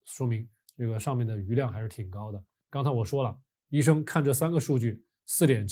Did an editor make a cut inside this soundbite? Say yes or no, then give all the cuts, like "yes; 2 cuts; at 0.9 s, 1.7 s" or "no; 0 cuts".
no; 0 cuts